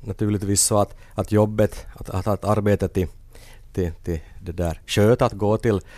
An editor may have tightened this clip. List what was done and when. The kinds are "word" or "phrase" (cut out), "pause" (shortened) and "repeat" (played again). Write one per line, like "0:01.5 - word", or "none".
none